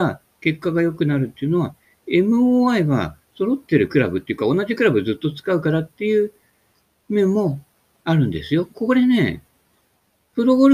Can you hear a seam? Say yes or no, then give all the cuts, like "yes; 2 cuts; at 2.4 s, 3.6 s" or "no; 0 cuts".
no; 0 cuts